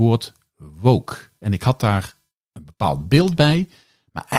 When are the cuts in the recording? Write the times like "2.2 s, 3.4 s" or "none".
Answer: none